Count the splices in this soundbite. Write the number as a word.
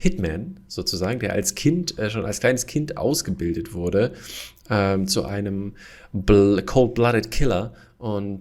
zero